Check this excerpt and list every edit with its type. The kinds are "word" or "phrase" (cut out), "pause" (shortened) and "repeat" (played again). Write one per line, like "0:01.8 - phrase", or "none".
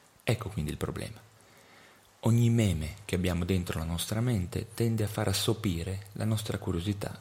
none